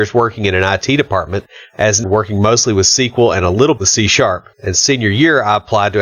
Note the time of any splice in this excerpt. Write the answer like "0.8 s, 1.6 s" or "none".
2.0 s, 3.8 s, 4.5 s